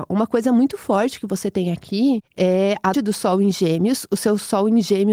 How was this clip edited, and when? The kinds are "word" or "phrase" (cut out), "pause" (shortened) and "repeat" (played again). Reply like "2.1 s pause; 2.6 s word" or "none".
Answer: 2.9 s word